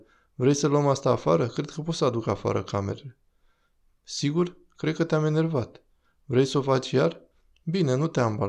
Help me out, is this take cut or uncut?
uncut